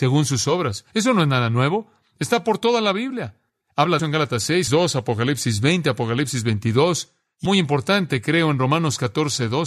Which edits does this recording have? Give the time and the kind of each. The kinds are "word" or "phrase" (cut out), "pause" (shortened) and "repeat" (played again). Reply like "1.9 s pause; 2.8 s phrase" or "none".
4.0 s word; 4.7 s word; 7.5 s phrase